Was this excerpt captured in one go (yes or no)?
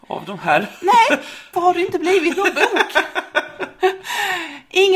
no